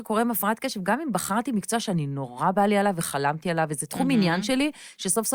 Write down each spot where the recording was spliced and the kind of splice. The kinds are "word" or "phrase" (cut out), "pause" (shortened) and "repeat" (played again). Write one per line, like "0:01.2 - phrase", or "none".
none